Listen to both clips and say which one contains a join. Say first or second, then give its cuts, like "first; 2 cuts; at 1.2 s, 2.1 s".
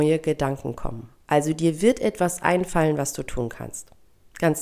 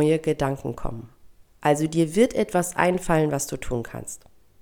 first; 1 cut; at 1.2 s